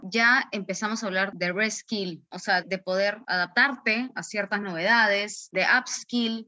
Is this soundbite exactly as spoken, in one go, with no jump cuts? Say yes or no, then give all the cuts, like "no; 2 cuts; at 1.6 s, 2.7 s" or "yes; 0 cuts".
yes; 0 cuts